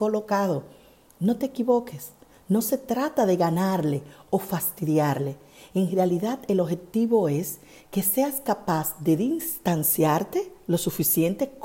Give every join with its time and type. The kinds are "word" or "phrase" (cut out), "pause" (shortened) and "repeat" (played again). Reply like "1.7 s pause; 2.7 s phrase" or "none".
none